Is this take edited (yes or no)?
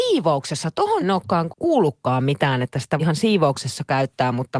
yes